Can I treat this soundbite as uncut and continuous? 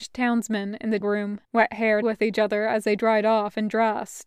no; 3 cuts; at 1.0 s, 1.4 s, 2.0 s

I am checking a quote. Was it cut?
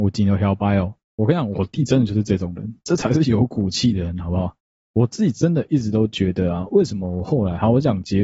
no; 0 cuts

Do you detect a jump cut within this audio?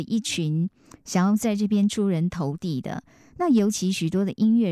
no; 0 cuts

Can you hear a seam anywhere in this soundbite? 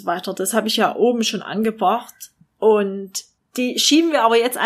no; 0 cuts

